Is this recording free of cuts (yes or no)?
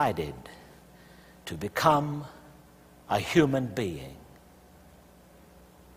yes